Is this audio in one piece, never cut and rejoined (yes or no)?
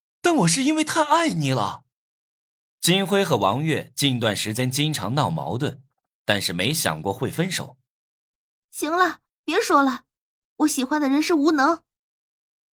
yes